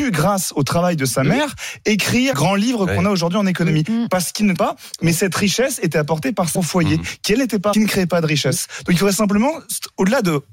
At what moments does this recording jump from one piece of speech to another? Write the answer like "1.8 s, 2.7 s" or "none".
2.3 s, 4.6 s, 6.6 s, 7.7 s